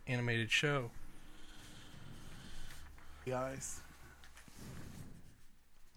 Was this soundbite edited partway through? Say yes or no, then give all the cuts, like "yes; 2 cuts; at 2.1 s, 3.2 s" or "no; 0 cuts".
yes; 1 cut; at 3.3 s